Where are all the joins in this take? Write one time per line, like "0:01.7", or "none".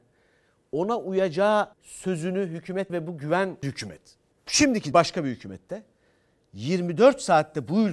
0:01.7
0:02.9
0:03.6
0:04.3
0:04.9